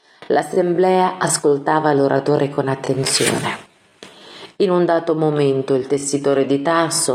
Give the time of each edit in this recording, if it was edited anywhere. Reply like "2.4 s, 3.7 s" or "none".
none